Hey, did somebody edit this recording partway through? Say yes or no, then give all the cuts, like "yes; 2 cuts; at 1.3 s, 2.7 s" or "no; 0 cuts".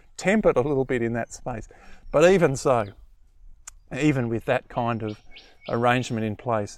no; 0 cuts